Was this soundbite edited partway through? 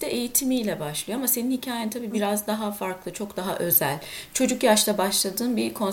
no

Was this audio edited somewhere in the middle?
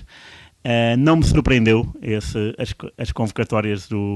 no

